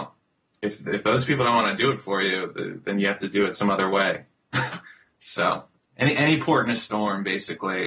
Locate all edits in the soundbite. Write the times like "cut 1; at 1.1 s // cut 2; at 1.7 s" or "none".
none